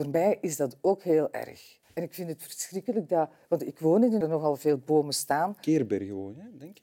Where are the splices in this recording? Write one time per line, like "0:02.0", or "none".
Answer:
0:01.8
0:04.2